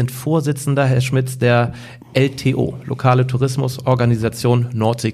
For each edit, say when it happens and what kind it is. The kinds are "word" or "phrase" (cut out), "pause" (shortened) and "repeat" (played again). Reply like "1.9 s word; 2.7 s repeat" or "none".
none